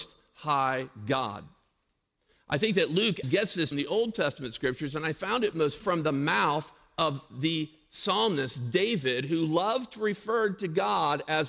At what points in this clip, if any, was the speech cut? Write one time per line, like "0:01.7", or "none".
0:03.2
0:03.7
0:05.8